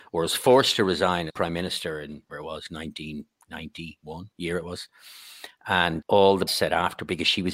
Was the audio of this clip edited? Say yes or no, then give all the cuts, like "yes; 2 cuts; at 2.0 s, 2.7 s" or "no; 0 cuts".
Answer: yes; 5 cuts; at 1.3 s, 2.3 s, 4.3 s, 6.0 s, 6.5 s